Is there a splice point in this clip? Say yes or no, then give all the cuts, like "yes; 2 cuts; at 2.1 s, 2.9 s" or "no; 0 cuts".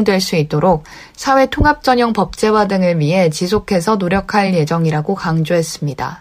no; 0 cuts